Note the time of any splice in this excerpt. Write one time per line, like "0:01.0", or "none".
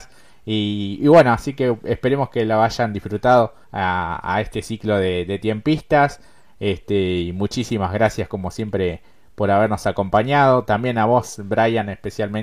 0:03.6